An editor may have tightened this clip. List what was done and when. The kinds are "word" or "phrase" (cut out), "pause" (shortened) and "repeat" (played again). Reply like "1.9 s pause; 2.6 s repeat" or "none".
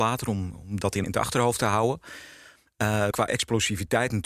1.0 s word; 3.1 s word